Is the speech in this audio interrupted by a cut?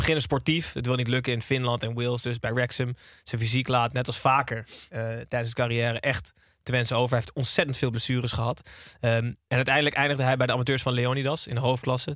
no; 0 cuts

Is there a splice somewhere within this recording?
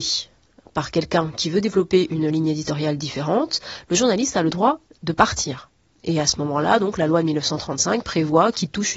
no; 0 cuts

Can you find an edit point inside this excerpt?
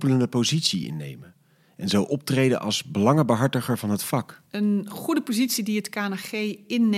yes; 1 cut; at 4.5 s

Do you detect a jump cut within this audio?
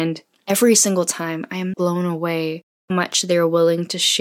yes; 2 cuts; at 1.7 s, 2.9 s

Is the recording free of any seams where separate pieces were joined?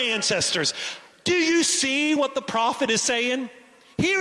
yes; 0 cuts

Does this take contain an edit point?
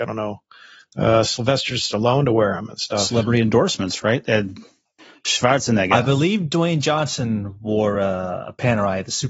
no; 0 cuts

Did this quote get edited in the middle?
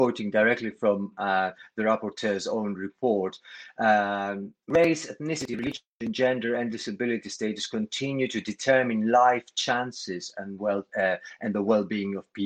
no; 0 cuts

